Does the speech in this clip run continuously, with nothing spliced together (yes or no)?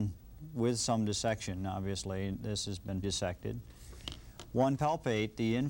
no